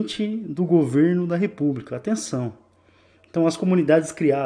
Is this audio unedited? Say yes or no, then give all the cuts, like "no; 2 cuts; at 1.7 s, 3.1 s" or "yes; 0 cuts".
yes; 0 cuts